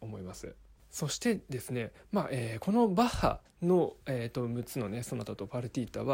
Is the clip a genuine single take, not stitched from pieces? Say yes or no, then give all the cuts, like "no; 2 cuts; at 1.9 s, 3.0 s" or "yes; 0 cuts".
no; 1 cut; at 3.5 s